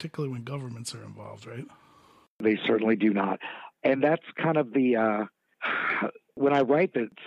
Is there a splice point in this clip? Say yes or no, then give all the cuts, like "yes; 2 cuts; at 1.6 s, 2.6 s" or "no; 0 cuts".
no; 0 cuts